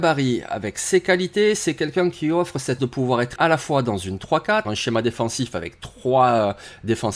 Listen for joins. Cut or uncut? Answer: cut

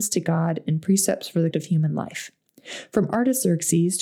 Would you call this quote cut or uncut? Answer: cut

